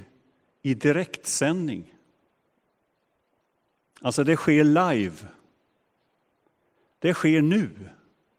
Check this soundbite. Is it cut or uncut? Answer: uncut